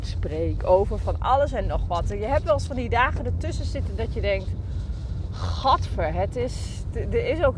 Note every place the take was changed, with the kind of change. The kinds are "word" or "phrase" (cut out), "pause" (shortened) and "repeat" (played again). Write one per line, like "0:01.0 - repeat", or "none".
none